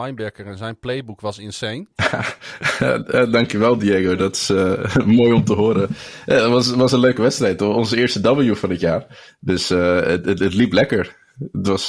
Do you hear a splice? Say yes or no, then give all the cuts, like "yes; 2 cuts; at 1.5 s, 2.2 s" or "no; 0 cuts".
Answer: yes; 1 cut; at 1.9 s